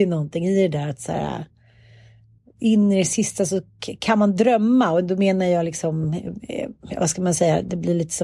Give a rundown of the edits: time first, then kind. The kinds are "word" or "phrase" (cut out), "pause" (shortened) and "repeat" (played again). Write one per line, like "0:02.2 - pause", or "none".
none